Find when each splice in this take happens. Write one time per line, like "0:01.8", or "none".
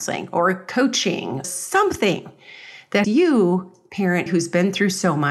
0:01.4
0:03.0
0:04.3